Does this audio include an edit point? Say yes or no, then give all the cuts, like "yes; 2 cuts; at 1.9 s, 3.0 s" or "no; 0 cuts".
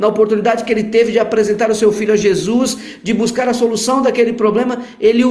no; 0 cuts